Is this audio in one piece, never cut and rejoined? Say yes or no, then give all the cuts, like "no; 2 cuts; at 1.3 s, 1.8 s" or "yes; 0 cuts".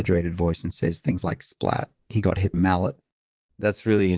no; 1 cut; at 2.5 s